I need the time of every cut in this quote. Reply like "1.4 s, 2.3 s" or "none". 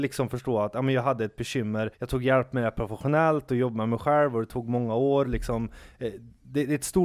1.9 s